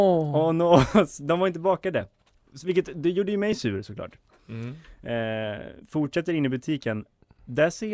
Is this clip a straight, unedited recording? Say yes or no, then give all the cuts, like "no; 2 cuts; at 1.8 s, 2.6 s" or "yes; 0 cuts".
no; 1 cut; at 5.8 s